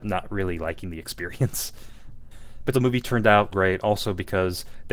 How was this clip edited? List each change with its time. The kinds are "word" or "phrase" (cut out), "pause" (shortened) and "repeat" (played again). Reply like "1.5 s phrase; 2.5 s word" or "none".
2.7 s word; 3.5 s word